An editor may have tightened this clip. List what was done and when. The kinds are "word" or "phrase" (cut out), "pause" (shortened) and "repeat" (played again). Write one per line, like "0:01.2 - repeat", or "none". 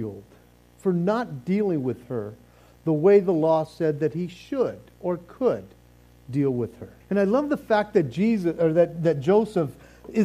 0:07.0 - pause